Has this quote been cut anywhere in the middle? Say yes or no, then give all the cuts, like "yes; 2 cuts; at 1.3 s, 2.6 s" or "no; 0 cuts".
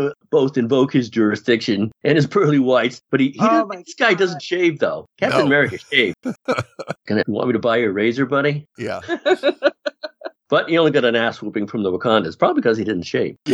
yes; 1 cut; at 7.2 s